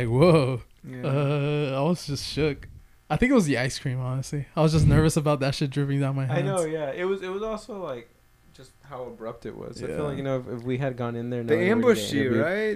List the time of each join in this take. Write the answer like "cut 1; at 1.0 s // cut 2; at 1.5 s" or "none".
none